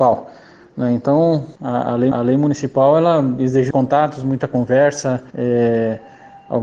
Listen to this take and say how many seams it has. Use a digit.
4